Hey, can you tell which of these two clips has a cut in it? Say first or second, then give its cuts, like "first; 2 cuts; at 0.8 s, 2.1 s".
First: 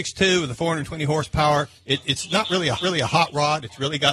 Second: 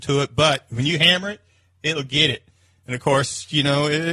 first; 2 cuts; at 1.8 s, 2.8 s